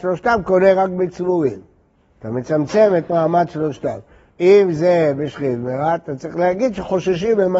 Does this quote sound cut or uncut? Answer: uncut